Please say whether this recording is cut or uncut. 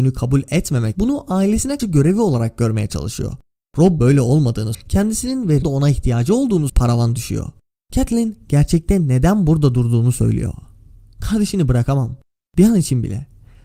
cut